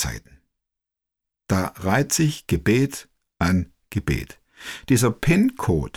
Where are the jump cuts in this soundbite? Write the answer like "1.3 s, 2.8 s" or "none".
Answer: none